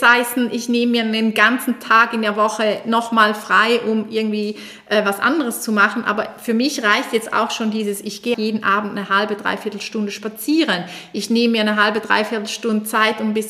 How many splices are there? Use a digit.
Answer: 1